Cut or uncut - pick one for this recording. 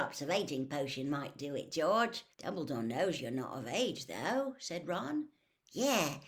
cut